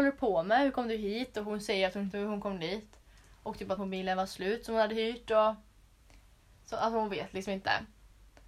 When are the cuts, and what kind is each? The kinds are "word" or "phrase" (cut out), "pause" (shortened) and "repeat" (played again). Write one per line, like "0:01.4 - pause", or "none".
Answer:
0:02.1 - word
0:03.8 - word